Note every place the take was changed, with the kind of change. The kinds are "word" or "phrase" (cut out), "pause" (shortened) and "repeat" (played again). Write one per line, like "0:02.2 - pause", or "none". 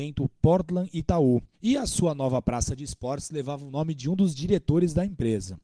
0:01.5 - pause